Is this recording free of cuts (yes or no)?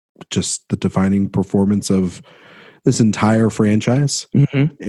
yes